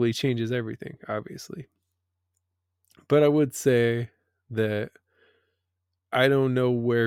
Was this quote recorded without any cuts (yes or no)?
yes